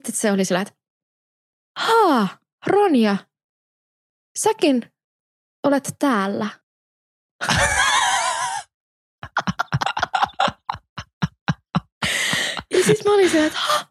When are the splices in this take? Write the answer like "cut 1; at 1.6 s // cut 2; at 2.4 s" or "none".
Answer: none